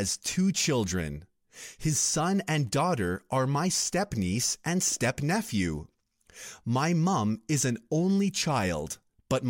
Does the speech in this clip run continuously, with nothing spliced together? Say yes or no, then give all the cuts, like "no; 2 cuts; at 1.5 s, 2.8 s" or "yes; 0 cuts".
yes; 0 cuts